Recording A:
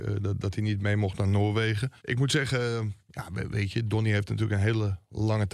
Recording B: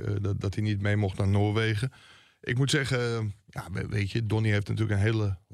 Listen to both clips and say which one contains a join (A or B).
A